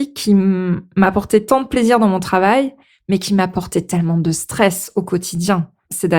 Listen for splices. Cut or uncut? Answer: uncut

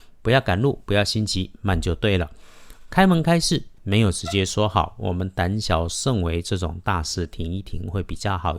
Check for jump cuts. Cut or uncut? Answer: uncut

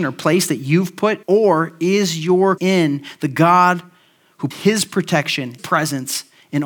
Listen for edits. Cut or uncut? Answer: cut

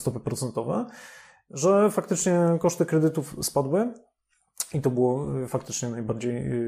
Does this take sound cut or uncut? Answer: uncut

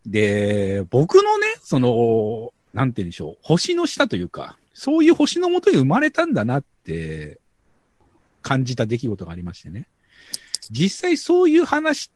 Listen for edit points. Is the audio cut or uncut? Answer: cut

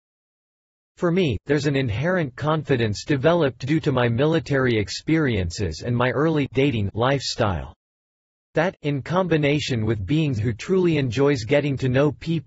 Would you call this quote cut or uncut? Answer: cut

